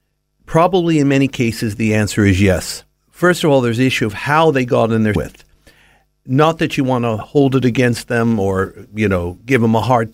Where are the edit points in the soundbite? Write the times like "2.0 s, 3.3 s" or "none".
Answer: 5.2 s

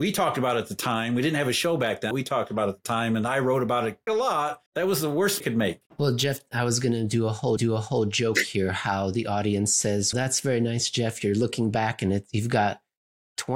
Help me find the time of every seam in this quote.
2.1 s, 4.1 s, 4.7 s, 5.4 s, 5.9 s, 7.6 s, 10.1 s

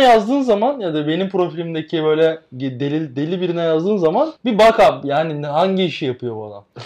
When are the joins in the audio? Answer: 4.4 s

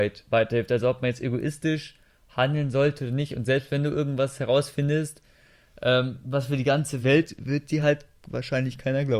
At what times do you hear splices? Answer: none

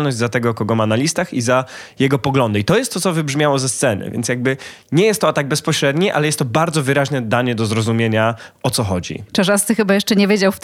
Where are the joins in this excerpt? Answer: none

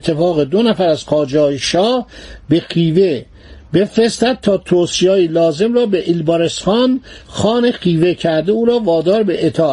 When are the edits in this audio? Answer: none

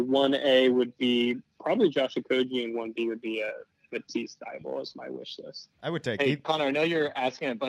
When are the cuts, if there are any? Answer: 5.7 s

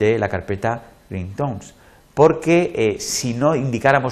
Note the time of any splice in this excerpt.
none

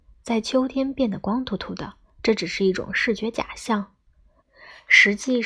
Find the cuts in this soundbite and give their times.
2.0 s

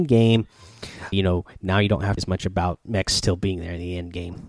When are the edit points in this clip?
1.1 s, 2.2 s, 2.8 s

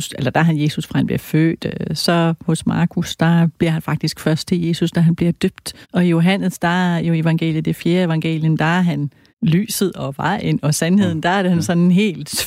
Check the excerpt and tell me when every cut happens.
5.8 s, 9.3 s

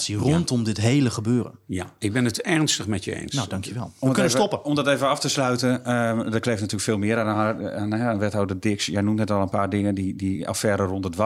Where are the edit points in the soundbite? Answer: none

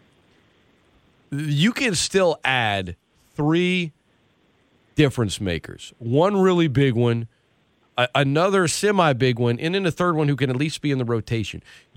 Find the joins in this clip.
none

